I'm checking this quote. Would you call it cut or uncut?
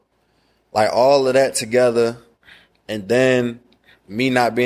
uncut